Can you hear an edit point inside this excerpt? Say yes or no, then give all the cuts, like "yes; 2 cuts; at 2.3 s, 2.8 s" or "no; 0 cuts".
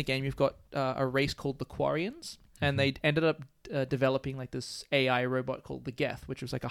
no; 0 cuts